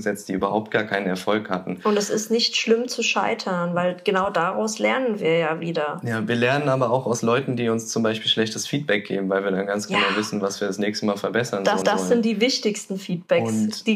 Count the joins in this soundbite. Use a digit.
1